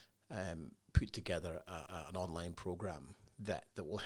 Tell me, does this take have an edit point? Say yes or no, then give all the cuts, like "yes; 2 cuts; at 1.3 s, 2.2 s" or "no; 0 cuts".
yes; 1 cut; at 1.9 s